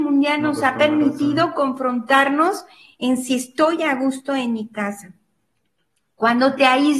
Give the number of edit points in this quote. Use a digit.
0